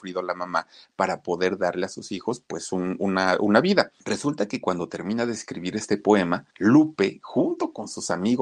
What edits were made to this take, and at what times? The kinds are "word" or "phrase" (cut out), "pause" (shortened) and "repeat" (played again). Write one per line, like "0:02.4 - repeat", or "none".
0:04.0 - pause
0:06.5 - pause